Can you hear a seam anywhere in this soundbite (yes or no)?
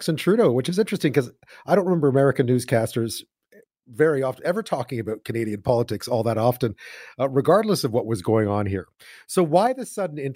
no